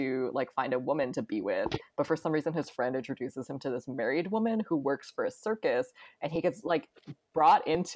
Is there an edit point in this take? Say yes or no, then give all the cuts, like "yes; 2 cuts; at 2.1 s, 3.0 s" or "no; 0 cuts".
no; 0 cuts